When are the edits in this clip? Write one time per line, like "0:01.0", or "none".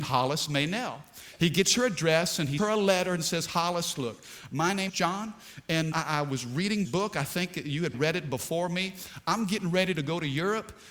0:02.6
0:04.9
0:05.9
0:06.8
0:07.9